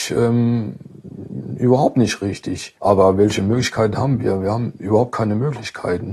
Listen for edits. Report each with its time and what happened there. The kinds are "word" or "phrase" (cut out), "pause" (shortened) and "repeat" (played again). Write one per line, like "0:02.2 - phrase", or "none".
0:02.8 - pause